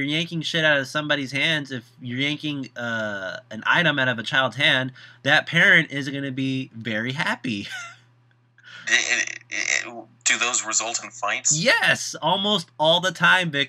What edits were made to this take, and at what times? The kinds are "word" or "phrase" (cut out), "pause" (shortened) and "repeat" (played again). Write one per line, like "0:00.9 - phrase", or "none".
none